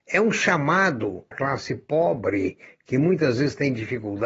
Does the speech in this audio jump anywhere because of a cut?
yes; 1 cut; at 1.3 s

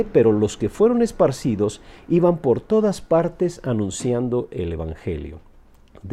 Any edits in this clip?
no; 0 cuts

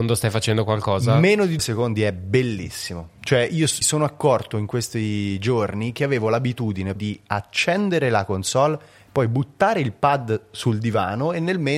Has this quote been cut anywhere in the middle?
yes; 3 cuts; at 1.6 s, 3.8 s, 7.0 s

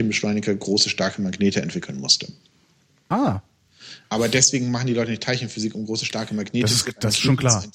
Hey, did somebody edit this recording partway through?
yes; 1 cut; at 4.0 s

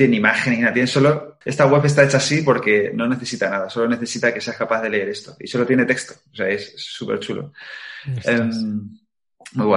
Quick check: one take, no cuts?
no; 1 cut; at 1.4 s

